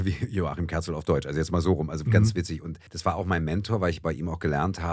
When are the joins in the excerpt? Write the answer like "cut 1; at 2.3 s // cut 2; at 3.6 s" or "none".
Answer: cut 1; at 2.9 s